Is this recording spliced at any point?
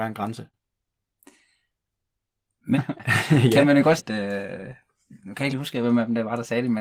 yes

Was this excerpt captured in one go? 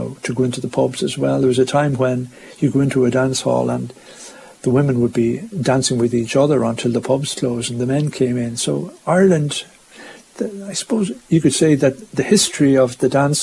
yes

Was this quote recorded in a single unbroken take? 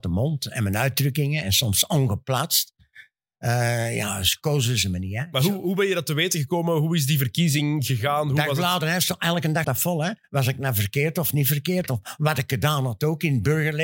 no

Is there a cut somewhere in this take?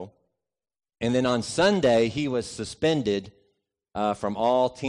no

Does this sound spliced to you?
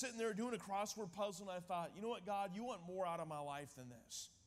no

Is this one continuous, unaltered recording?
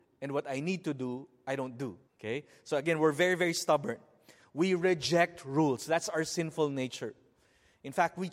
no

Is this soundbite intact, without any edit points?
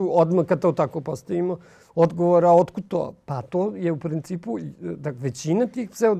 yes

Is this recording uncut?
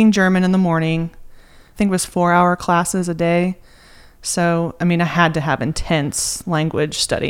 no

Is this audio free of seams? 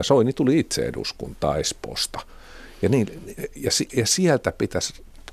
yes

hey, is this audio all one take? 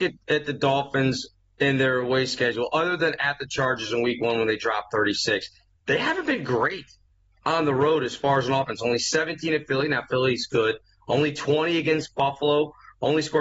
yes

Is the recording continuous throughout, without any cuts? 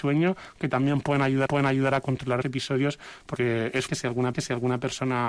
no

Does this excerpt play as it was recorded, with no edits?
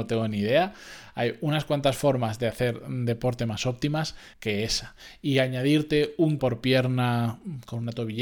no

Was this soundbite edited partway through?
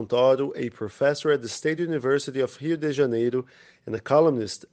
no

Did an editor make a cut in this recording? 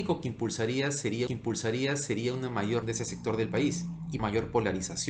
yes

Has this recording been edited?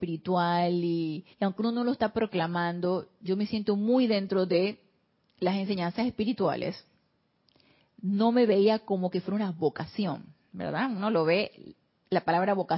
yes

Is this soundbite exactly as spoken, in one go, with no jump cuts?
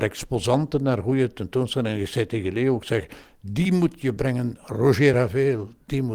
yes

